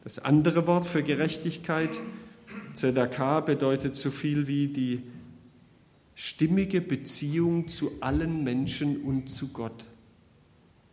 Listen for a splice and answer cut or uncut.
uncut